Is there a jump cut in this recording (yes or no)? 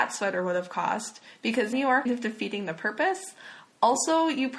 yes